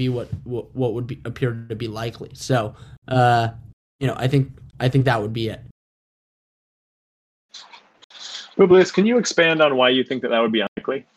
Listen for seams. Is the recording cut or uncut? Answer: uncut